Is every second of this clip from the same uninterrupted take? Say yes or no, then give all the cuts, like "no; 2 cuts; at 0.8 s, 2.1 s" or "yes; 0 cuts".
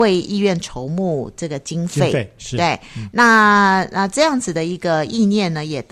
yes; 0 cuts